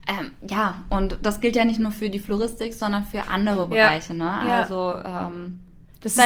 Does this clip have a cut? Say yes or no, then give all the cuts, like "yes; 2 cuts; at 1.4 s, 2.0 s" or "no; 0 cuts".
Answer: no; 0 cuts